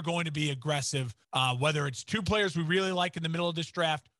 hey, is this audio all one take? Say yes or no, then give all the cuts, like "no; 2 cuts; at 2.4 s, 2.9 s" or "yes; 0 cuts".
no; 1 cut; at 1.2 s